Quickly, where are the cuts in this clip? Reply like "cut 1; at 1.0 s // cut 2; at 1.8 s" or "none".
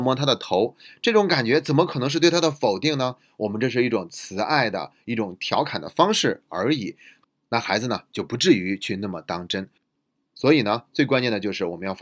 none